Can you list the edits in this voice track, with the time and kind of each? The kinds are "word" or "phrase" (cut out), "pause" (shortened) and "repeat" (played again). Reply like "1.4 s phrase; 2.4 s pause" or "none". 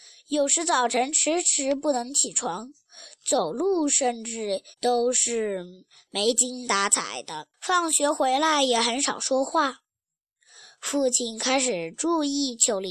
4.7 s pause; 7.5 s pause